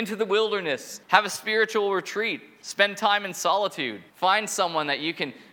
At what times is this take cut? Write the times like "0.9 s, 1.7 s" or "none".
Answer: 1.0 s, 4.1 s